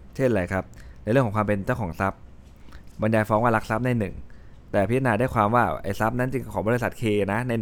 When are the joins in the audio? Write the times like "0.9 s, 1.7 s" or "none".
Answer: 2.9 s

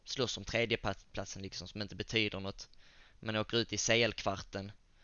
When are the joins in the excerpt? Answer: none

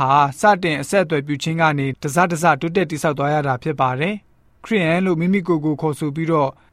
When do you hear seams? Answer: none

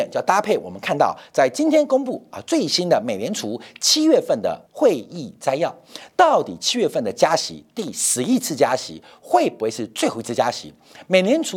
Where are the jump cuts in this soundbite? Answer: 4.7 s

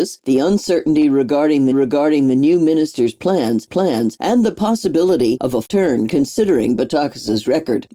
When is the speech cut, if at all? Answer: 1.7 s, 3.7 s, 5.7 s

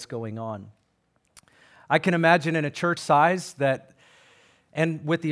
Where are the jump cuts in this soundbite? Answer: 3.0 s

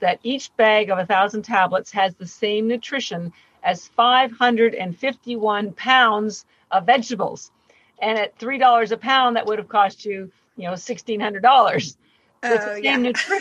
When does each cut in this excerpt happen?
none

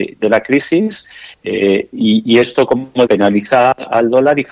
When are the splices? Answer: 3.1 s

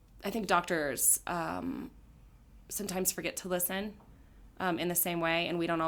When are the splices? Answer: none

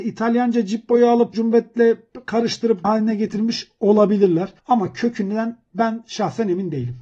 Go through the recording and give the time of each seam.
1.3 s, 2.8 s, 4.6 s

